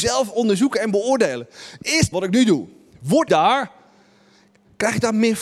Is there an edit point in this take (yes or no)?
yes